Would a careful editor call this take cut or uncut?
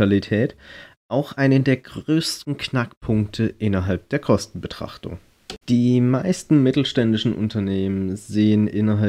cut